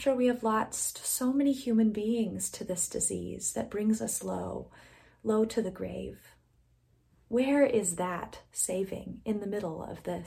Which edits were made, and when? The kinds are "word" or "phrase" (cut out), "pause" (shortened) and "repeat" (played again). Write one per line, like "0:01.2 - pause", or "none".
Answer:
none